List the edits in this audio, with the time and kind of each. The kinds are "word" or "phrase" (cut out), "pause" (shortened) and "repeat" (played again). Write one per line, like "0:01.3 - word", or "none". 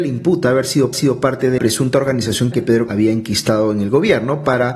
0:00.9 - repeat
0:01.6 - word
0:02.5 - word
0:02.9 - word